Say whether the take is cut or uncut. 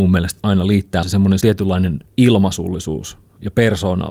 cut